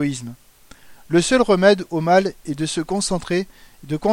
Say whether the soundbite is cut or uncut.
uncut